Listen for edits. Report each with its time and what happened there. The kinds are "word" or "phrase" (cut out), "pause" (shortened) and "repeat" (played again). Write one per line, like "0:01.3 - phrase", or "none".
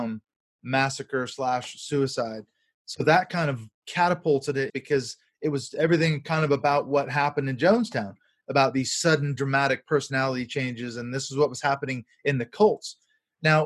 0:04.7 - phrase

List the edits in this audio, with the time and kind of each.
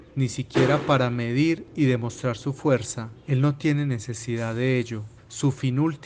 0:03.1 - pause
0:05.2 - pause

